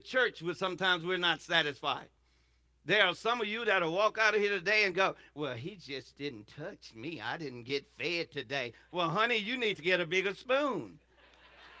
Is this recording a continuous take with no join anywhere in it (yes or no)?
yes